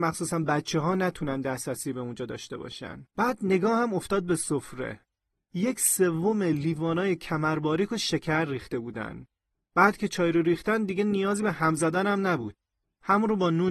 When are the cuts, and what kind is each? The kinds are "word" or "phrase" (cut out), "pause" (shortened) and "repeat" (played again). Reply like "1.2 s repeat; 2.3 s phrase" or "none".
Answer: 3.1 s pause